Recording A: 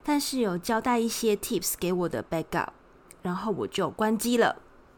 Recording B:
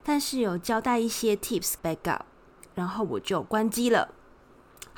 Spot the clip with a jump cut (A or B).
B